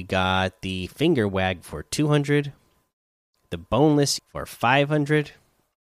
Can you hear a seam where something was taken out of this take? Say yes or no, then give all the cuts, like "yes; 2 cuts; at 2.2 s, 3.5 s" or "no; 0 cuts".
yes; 2 cuts; at 1.6 s, 4.2 s